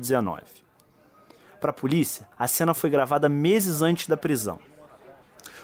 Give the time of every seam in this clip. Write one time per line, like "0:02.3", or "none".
0:02.3